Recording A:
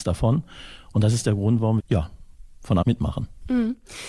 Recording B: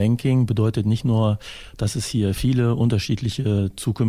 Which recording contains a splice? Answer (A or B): A